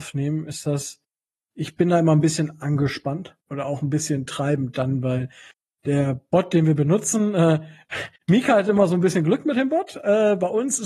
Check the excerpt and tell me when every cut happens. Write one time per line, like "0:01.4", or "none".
0:03.4
0:08.2